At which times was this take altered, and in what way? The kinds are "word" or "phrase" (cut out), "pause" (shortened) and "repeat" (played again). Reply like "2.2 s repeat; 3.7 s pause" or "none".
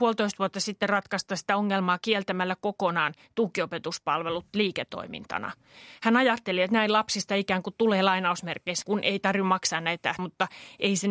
8.8 s word; 10.2 s word